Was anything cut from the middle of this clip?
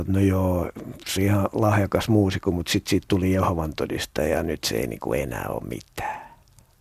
yes; 1 cut; at 1.2 s

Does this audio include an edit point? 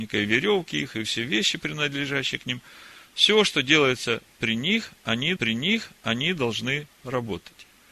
yes; 1 cut; at 5.4 s

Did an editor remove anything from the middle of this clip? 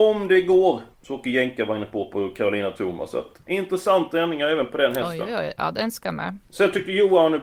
yes; 2 cuts; at 0.9 s, 6.4 s

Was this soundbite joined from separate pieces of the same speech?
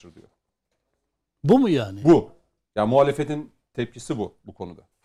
no; 0 cuts

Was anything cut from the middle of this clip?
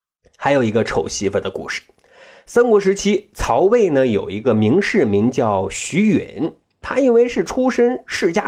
no; 0 cuts

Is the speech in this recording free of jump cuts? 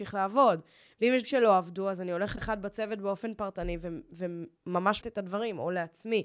no; 4 cuts; at 1.2 s, 2.4 s, 4.6 s, 5.0 s

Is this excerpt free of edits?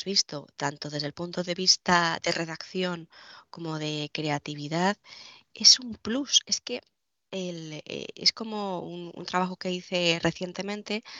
yes; 0 cuts

